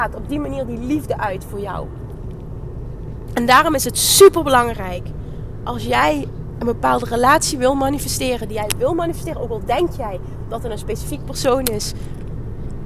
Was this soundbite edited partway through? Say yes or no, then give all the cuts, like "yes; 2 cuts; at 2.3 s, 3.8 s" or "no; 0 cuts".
no; 0 cuts